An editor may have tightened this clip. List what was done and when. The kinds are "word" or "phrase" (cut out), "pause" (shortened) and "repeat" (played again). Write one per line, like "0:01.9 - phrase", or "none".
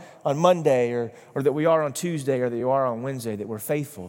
none